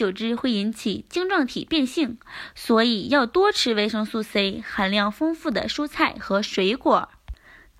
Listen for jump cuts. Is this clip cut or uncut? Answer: uncut